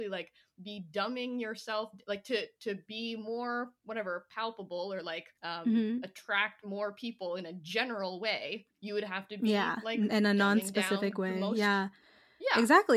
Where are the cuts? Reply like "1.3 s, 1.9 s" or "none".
3.8 s, 5.4 s, 8.7 s